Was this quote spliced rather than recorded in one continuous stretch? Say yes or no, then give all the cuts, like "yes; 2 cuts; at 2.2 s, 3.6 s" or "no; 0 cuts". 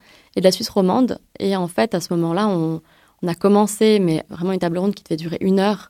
no; 0 cuts